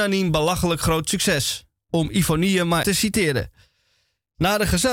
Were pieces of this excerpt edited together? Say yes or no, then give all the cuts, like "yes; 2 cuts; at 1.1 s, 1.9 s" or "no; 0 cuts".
yes; 1 cut; at 2.8 s